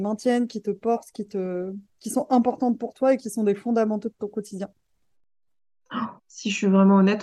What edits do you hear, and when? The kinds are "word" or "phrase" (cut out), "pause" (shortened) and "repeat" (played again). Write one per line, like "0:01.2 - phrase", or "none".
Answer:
0:06.2 - pause

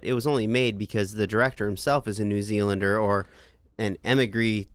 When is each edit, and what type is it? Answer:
none

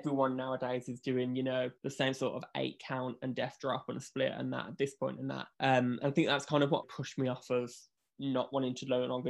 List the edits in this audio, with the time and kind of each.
0:01.8 - pause
0:05.5 - pause
0:06.8 - word

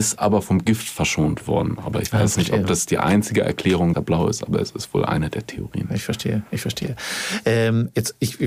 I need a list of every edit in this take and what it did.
0:03.9 - phrase

